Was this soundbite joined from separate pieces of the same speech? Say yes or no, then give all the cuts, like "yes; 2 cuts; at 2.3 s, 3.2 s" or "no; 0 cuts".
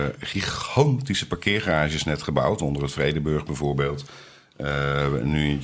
no; 0 cuts